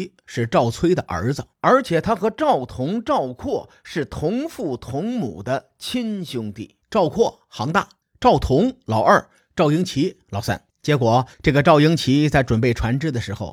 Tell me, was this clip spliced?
yes; 5 cuts; at 1.5 s, 6.8 s, 8.0 s, 10.7 s, 11.3 s

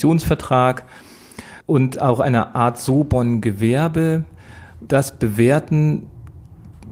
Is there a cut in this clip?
yes; 2 cuts; at 1.6 s, 4.9 s

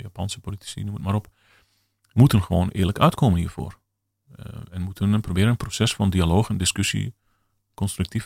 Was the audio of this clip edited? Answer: no; 0 cuts

